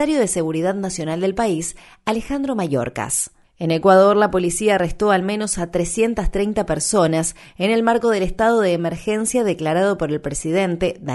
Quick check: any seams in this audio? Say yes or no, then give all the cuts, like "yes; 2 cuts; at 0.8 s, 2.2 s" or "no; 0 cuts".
no; 0 cuts